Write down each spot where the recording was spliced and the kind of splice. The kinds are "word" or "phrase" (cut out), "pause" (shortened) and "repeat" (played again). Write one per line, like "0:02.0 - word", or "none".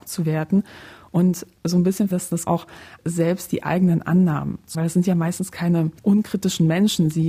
0:01.6 - pause
0:02.1 - word
0:02.5 - word
0:03.0 - word
0:04.7 - word
0:06.0 - pause

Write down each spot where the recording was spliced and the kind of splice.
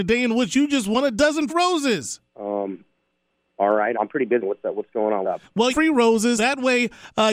0:01.5 - word
0:02.3 - pause
0:03.9 - word
0:04.4 - word
0:05.2 - word
0:05.7 - phrase
0:06.4 - word

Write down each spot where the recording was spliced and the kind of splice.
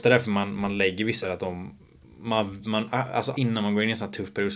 0:01.2 - word
0:02.0 - pause
0:03.3 - word

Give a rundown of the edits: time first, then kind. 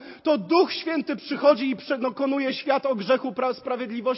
none

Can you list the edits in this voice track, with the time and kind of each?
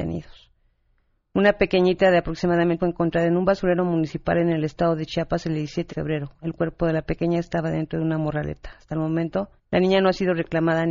0:02.8 - phrase
0:05.9 - word
0:09.6 - pause

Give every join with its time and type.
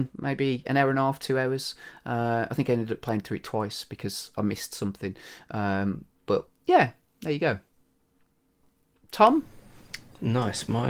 none

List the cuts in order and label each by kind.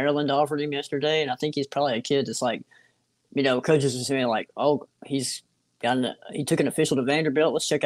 none

